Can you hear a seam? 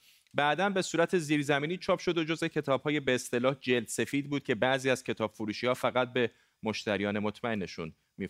no; 0 cuts

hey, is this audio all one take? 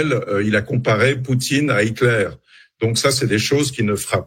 yes; 0 cuts

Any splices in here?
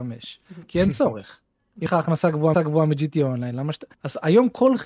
yes; 3 cuts; at 1.9 s, 2.5 s, 3.9 s

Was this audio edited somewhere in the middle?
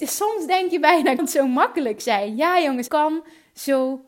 yes; 2 cuts; at 1.2 s, 2.9 s

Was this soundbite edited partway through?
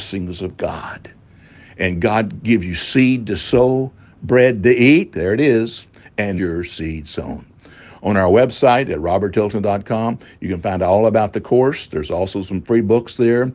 yes; 1 cut; at 6.4 s

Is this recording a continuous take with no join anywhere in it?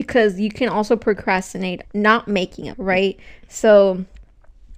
no; 2 cuts; at 1.8 s, 2.7 s

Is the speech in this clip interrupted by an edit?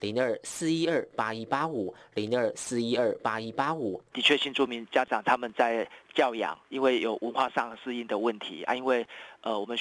yes; 1 cut; at 6.6 s

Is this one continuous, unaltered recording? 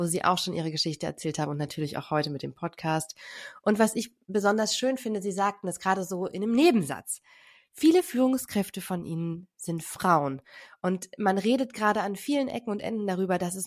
yes; 0 cuts

